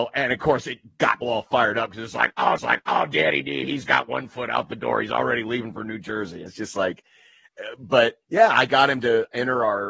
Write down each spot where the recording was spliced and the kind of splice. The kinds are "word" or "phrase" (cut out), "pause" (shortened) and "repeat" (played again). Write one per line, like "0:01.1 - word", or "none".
0:01.2 - word
0:02.6 - repeat
0:06.5 - word
0:08.2 - pause